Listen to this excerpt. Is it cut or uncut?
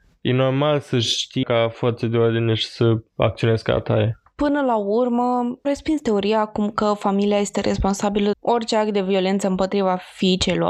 cut